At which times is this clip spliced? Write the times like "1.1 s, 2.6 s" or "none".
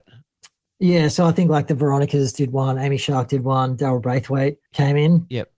4.7 s